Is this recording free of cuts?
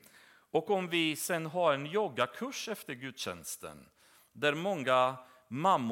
yes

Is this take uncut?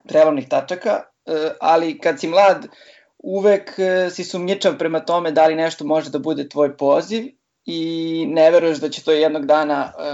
yes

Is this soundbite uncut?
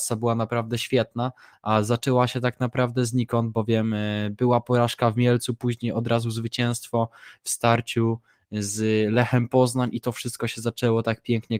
yes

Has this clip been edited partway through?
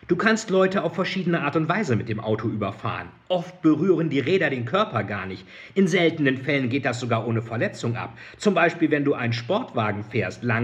no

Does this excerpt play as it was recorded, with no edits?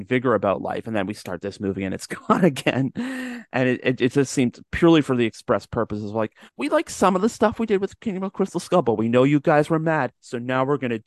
no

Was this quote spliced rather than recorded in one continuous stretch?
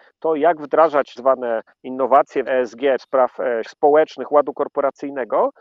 yes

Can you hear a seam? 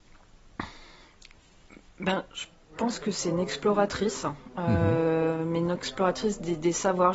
no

